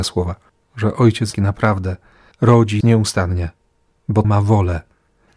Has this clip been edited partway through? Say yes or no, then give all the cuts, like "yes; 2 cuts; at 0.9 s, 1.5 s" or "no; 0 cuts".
yes; 3 cuts; at 1.3 s, 2.8 s, 4.2 s